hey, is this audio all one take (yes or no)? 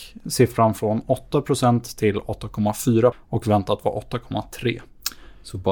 no